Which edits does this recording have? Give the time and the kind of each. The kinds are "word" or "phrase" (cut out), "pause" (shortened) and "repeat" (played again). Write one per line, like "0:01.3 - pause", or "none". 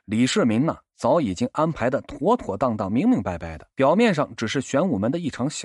0:03.7 - pause

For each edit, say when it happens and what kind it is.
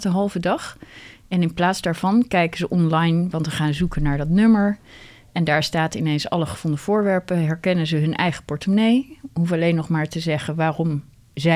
none

